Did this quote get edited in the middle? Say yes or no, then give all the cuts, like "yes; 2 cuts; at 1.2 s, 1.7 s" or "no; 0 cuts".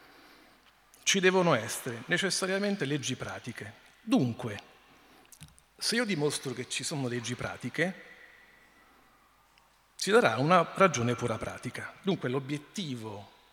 no; 0 cuts